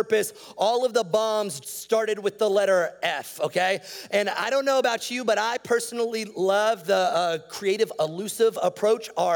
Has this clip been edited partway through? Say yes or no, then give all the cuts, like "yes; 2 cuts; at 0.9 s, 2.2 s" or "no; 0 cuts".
yes; 1 cut; at 1.6 s